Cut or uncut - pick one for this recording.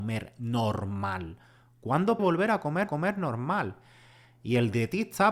cut